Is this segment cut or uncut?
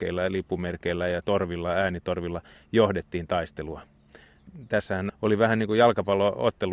uncut